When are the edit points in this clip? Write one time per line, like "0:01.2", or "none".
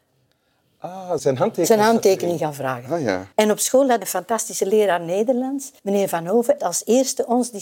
0:01.2
0:03.3
0:04.0
0:05.8
0:06.6